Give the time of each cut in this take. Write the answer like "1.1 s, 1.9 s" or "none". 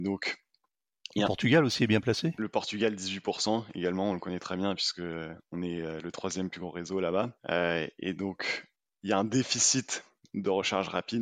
none